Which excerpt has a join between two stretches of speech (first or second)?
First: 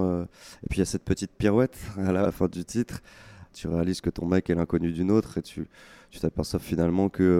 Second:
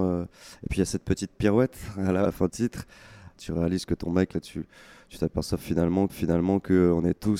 second